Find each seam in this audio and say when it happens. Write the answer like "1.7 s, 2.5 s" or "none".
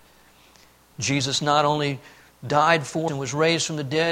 3.1 s